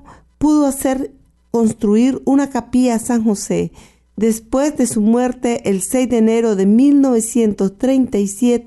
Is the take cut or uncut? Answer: uncut